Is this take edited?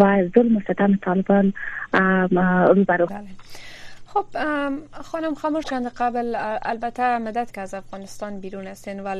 yes; 3 cuts; at 3.1 s, 5.6 s, 7.5 s

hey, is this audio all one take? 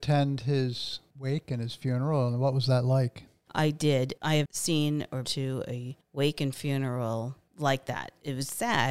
no; 2 cuts; at 4.5 s, 5.2 s

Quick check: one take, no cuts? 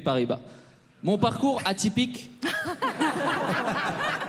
yes; 0 cuts

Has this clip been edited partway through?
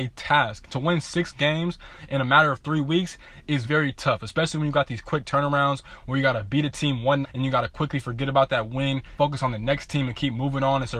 yes; 3 cuts; at 3.6 s, 7.2 s, 9.2 s

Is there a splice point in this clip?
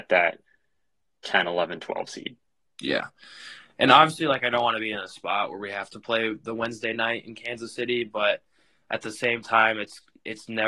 no; 0 cuts

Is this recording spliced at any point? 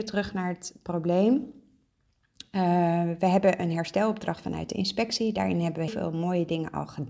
yes; 1 cut; at 5.9 s

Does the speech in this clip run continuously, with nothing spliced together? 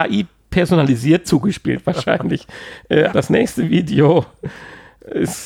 no; 2 cuts; at 1.2 s, 3.1 s

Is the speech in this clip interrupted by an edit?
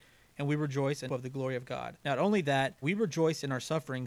yes; 3 cuts; at 1.1 s, 2.0 s, 2.8 s

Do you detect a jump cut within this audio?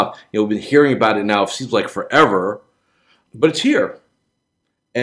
no; 0 cuts

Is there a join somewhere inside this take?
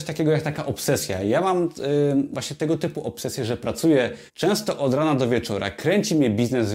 yes; 1 cut; at 4.3 s

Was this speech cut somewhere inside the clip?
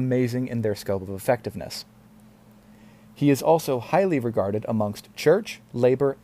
no; 0 cuts

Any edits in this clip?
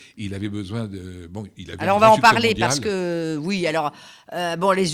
no; 0 cuts

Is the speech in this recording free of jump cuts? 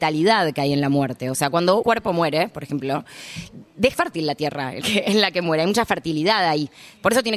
no; 3 cuts; at 1.8 s, 3.9 s, 4.8 s

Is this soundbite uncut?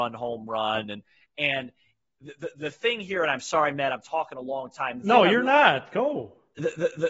yes; 0 cuts

